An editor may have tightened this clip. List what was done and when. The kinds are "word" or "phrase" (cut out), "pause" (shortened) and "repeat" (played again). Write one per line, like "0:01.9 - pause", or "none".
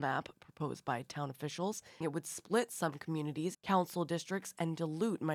0:02.0 - word
0:03.5 - phrase